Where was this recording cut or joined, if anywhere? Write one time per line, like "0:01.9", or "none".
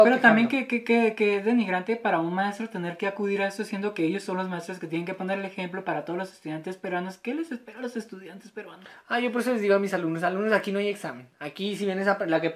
none